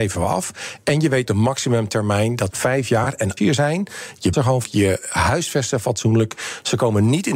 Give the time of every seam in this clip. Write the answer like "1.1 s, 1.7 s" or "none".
1.3 s, 2.5 s, 3.4 s, 4.3 s, 4.6 s